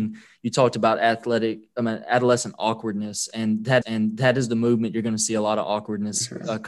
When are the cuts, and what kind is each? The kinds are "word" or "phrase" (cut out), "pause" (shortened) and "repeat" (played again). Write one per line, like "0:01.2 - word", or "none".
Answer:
0:03.8 - repeat